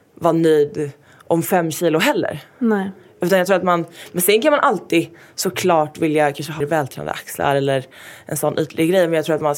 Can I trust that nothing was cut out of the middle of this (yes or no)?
no